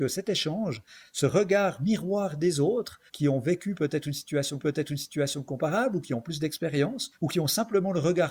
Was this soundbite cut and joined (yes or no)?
yes